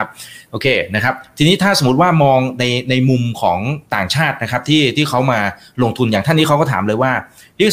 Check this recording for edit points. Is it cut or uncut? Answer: cut